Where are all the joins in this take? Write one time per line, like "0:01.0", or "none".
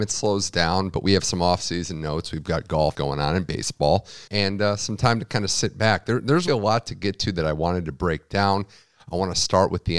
0:02.9
0:04.3
0:06.5